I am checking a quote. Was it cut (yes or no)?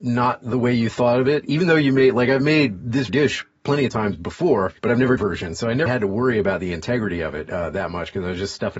yes